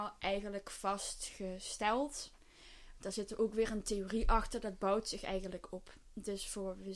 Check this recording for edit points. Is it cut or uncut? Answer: uncut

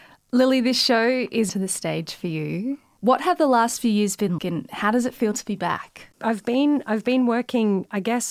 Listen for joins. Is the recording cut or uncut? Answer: cut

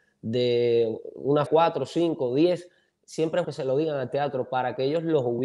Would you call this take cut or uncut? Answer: cut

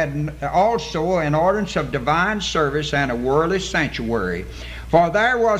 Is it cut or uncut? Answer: uncut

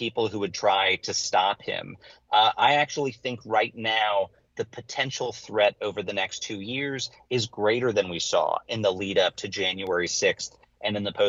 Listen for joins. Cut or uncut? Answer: uncut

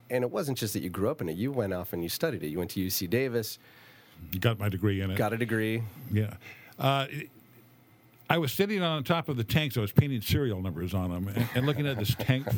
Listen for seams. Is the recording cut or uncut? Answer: uncut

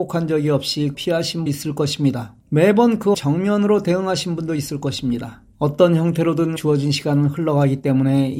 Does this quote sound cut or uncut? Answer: cut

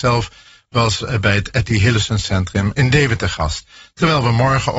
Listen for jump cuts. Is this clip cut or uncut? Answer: uncut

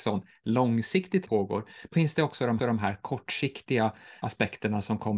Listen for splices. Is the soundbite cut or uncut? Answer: cut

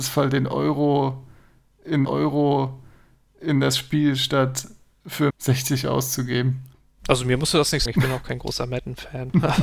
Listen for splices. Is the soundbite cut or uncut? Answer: cut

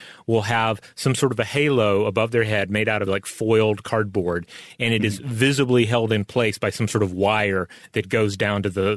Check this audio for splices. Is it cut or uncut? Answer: cut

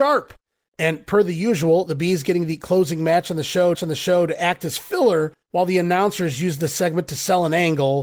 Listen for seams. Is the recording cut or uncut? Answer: cut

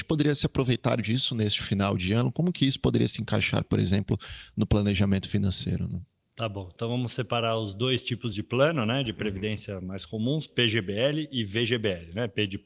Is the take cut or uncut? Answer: uncut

